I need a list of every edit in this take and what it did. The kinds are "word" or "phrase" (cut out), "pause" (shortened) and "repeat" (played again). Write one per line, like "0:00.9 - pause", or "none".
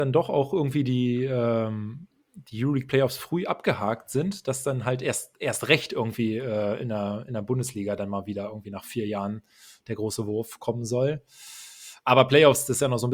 none